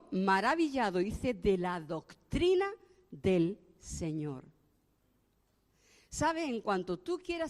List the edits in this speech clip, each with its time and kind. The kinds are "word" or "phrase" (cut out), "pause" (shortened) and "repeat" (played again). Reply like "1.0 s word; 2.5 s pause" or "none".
none

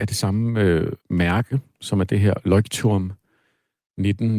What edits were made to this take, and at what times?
1.0 s pause

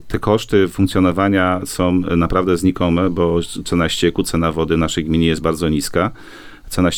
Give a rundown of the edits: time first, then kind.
none

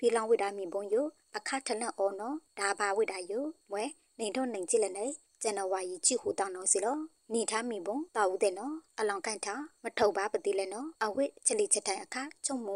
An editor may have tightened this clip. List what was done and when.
8.1 s pause; 11.0 s pause

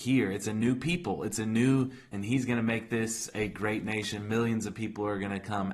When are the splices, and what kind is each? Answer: 2.1 s word

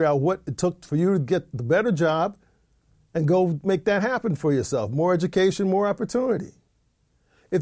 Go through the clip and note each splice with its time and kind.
none

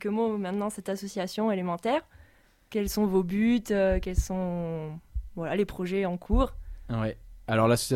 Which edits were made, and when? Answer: none

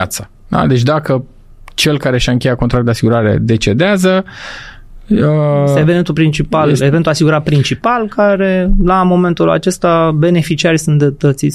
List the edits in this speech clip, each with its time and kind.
none

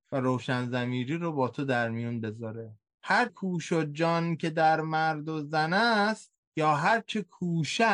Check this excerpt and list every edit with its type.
3.3 s word

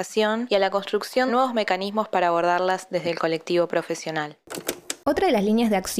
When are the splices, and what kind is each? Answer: 1.3 s word

